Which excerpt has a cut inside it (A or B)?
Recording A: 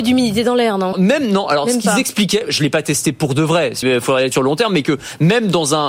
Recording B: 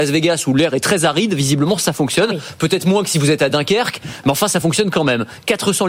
A